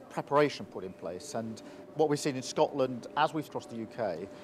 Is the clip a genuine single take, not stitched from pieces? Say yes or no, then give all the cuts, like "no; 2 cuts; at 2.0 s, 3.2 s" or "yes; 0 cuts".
no; 2 cuts; at 1.9 s, 3.4 s